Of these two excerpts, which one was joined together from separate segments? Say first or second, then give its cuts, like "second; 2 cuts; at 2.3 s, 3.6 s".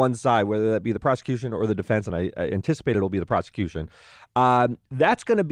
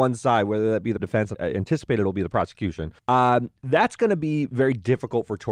second; 3 cuts; at 1.0 s, 1.3 s, 3.0 s